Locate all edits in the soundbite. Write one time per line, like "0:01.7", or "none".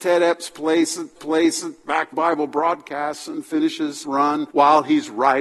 0:01.2
0:02.1
0:04.0
0:04.5